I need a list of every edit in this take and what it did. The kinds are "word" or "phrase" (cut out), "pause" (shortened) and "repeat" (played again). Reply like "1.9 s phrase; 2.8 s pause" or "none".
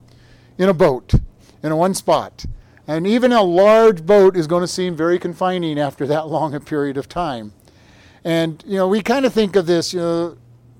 none